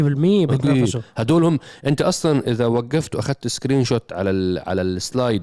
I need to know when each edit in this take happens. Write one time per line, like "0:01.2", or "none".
none